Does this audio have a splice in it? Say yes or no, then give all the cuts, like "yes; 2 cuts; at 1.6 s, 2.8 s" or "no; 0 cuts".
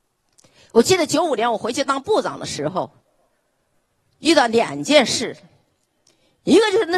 no; 0 cuts